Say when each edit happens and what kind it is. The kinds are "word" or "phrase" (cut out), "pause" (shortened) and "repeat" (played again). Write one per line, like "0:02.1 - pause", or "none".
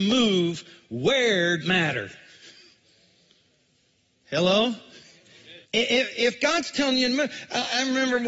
0:01.6 - word
0:05.6 - pause